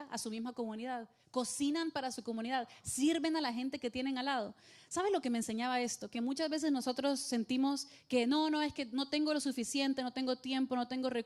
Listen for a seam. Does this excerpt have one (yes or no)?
no